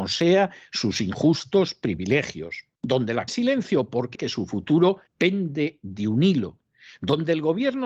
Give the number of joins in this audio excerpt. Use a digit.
4